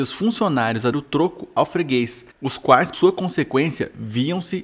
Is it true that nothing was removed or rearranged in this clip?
no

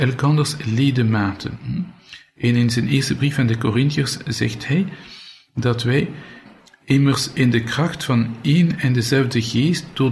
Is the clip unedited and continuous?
yes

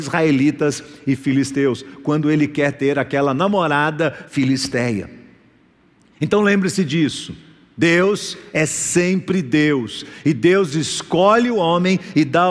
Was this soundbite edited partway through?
no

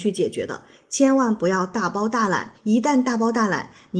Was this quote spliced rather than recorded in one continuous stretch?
yes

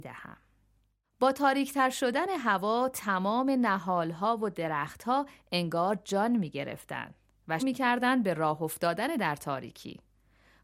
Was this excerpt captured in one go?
no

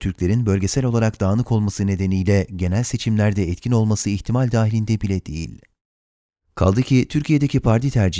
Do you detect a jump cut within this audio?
no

